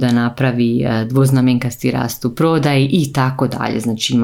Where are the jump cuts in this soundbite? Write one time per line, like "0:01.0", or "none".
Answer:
none